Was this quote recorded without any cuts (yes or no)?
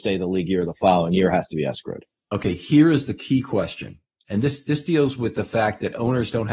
yes